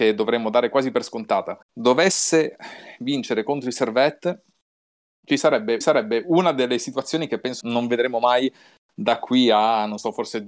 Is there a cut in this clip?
yes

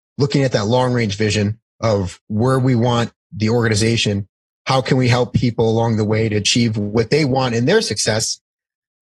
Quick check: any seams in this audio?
no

